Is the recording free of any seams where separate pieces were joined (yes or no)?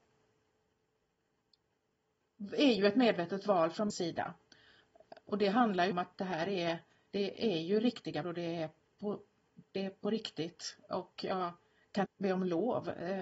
no